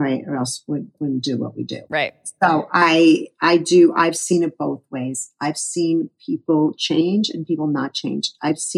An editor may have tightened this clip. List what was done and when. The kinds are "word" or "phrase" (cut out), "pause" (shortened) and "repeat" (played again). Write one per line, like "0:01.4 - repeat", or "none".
0:01.9 - pause